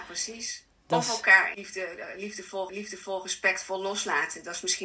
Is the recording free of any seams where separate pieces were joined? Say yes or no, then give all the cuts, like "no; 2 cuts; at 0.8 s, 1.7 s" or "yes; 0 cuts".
no; 2 cuts; at 1.5 s, 2.7 s